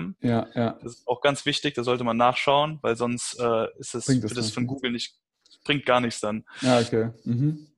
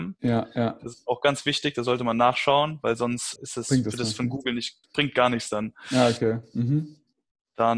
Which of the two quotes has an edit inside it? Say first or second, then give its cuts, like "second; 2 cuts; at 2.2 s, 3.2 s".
second; 2 cuts; at 3.4 s, 4.8 s